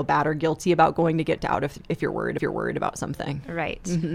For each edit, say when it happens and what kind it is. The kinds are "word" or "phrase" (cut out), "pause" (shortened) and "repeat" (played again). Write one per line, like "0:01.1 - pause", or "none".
0:01.4 - word
0:02.4 - repeat